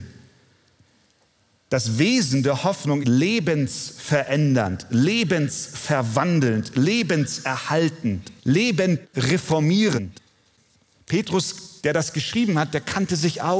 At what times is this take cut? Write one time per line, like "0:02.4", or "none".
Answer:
0:03.0
0:08.4
0:11.8